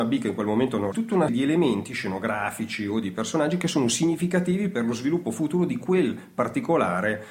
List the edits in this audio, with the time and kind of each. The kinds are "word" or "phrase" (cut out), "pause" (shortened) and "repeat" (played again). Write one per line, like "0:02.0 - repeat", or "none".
0:00.9 - phrase
0:01.3 - word

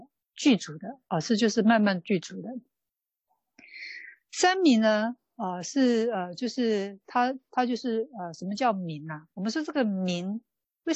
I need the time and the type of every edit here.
0:09.3 - pause

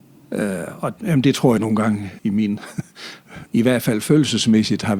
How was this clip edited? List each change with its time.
0:01.0 - word
0:01.6 - phrase
0:02.2 - word
0:03.5 - word

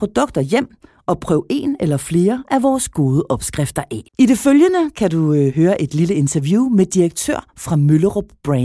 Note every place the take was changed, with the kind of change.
0:04.1 - pause

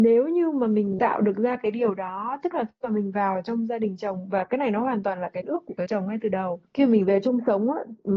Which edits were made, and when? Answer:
0:05.4 - word
0:05.9 - word
0:06.7 - pause

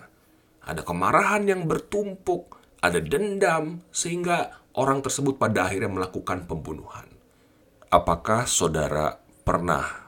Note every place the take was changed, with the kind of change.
none

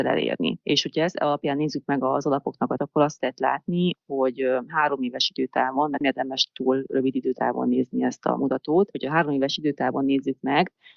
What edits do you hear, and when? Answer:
0:02.8 - word
0:06.0 - word

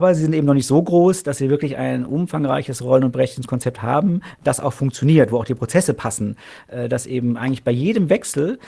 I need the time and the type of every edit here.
none

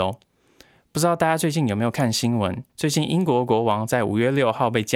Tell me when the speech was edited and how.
0:02.7 - pause

